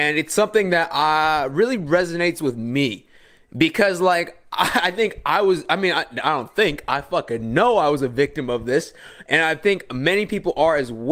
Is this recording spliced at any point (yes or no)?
no